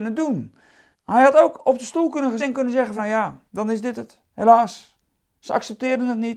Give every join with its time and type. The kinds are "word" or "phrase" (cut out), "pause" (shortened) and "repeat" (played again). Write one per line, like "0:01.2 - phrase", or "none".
0:00.9 - pause
0:02.4 - word
0:03.0 - word
0:03.5 - pause